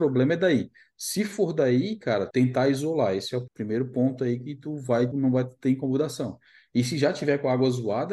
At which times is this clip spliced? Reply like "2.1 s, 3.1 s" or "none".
2.3 s, 3.5 s, 5.1 s